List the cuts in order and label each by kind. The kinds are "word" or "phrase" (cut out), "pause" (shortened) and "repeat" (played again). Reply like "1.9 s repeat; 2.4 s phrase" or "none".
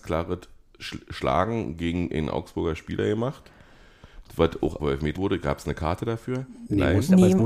4.8 s word; 5.2 s word